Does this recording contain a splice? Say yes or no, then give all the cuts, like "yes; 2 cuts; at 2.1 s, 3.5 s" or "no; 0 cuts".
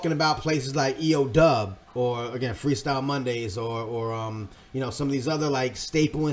yes; 1 cut; at 1.8 s